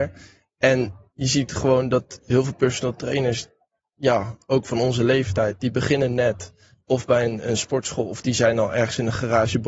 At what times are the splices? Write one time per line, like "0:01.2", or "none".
none